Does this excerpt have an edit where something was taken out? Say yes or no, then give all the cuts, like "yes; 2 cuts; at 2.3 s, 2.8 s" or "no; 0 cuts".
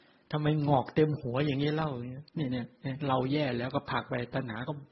yes; 1 cut; at 2.3 s